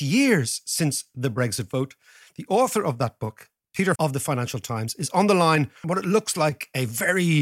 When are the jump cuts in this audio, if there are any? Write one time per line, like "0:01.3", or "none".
0:04.0
0:05.8